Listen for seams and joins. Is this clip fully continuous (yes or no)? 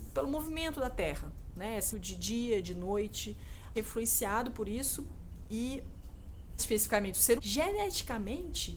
no